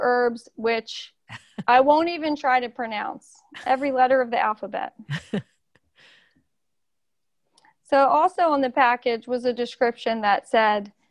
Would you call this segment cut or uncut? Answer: uncut